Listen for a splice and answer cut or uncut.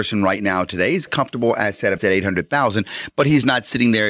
cut